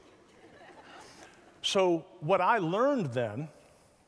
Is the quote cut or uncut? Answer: uncut